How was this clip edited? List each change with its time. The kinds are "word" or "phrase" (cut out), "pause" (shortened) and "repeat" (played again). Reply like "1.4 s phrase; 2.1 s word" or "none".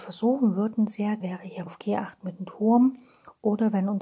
1.2 s word; 1.7 s phrase